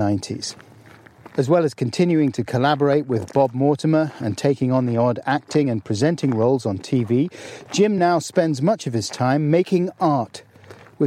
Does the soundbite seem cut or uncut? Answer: uncut